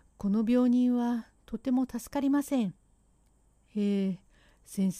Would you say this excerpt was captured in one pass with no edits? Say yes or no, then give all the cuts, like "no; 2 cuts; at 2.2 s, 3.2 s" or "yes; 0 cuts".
no; 1 cut; at 2.8 s